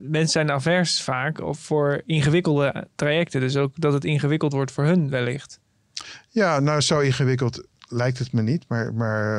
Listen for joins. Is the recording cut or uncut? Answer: uncut